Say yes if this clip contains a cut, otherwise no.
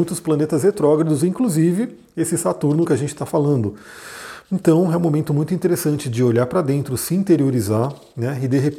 no